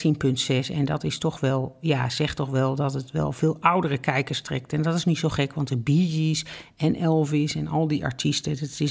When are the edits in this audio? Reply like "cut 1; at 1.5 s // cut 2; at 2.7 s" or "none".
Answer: none